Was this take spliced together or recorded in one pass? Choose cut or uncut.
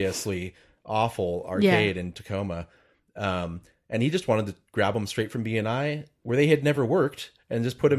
uncut